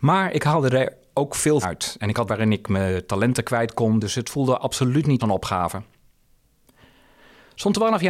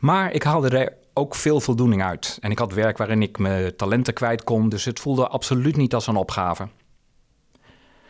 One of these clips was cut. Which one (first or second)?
first